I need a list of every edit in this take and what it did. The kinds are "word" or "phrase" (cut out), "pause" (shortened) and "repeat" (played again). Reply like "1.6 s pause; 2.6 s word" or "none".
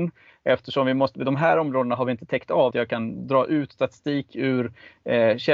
2.7 s phrase